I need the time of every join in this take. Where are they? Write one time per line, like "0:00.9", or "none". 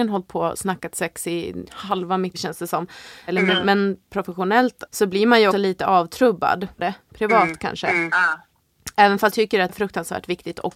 0:01.7
0:02.3
0:03.5
0:04.9
0:05.5
0:06.8
0:09.3
0:09.7